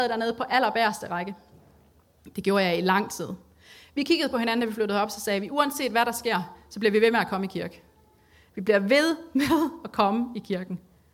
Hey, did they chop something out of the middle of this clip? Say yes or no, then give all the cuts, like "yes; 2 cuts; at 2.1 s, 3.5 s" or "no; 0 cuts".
no; 0 cuts